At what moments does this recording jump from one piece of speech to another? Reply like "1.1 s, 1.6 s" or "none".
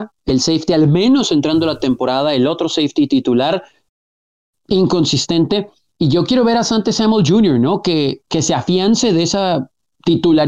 none